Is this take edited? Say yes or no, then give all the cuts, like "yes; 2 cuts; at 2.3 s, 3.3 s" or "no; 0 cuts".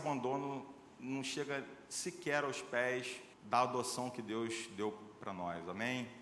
yes; 1 cut; at 3.3 s